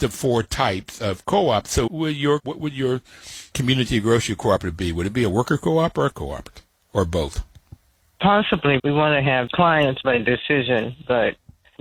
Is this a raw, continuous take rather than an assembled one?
no; 7 cuts; at 1.9 s, 2.4 s, 3.5 s, 6.1 s, 8.8 s, 9.5 s, 10.0 s

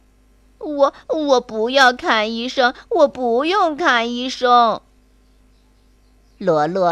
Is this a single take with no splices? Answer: yes; 0 cuts

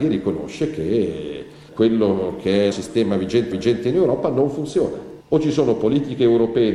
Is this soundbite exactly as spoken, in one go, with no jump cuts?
no; 4 cuts; at 1.7 s, 2.7 s, 3.5 s, 5.2 s

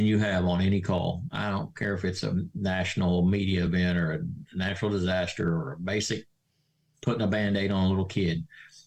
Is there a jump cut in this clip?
no; 0 cuts

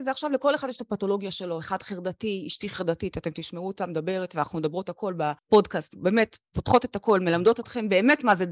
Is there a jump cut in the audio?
yes; 1 cut; at 5.4 s

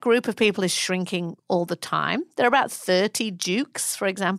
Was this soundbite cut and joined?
no; 0 cuts

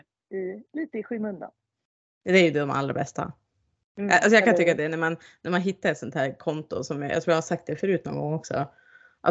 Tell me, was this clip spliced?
no; 0 cuts

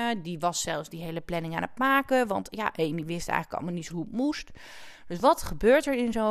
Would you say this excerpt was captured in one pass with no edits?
no; 1 cut; at 3.9 s

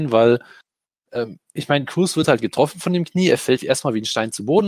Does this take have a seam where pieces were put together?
no; 0 cuts

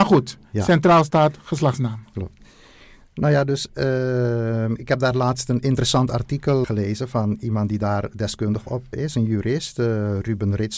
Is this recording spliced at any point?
yes; 2 cuts; at 6.6 s, 8.9 s

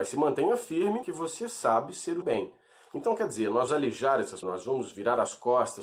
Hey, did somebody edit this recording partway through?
yes; 4 cuts; at 1.0 s, 2.2 s, 3.7 s, 4.4 s

